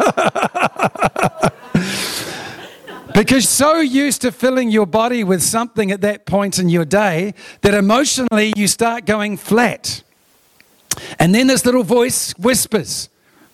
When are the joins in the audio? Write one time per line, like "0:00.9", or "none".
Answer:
0:03.4